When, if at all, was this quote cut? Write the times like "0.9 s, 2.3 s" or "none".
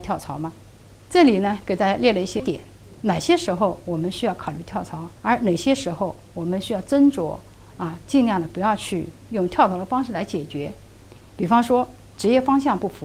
5.2 s, 12.1 s